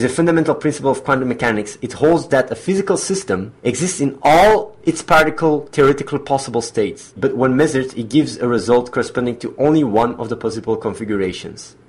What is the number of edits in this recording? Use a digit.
1